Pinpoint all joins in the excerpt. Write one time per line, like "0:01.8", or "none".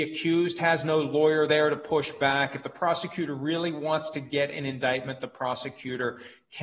none

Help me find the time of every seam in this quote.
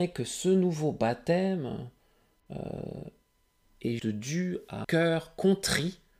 0:04.0
0:04.8

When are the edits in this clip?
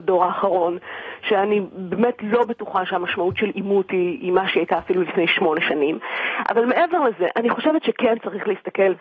none

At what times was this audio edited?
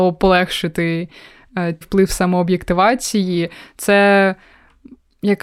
0:01.8

